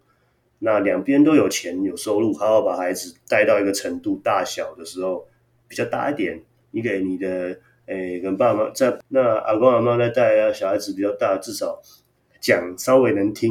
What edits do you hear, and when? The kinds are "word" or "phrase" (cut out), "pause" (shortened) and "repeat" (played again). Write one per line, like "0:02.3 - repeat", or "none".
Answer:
none